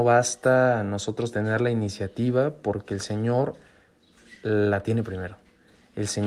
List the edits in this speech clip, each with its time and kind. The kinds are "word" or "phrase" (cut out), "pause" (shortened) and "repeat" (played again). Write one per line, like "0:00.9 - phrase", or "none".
none